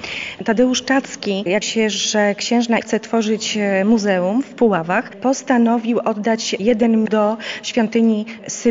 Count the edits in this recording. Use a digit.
3